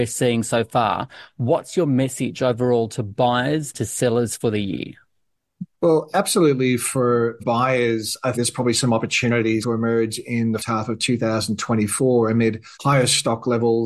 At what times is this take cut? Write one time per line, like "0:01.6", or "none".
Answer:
0:03.7
0:05.7
0:07.4
0:08.3
0:09.6
0:10.6
0:12.7